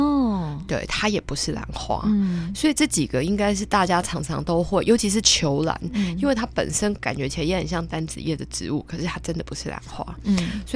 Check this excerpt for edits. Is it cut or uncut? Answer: uncut